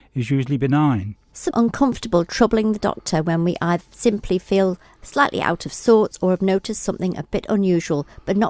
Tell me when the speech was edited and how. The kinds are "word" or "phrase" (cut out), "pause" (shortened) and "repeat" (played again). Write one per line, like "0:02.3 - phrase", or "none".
0:01.5 - phrase